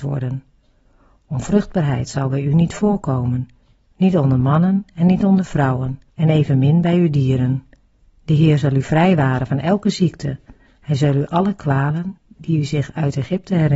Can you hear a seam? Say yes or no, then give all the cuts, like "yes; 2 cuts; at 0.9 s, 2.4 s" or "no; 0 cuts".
yes; 3 cuts; at 6.1 s, 8.0 s, 12.2 s